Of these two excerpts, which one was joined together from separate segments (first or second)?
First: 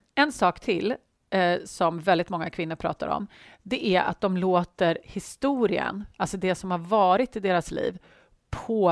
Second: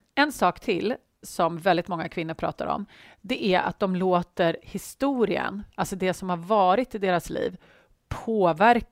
second